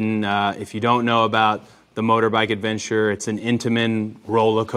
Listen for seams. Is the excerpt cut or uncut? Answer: uncut